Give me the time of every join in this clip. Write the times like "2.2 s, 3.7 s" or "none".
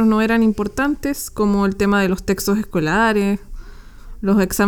none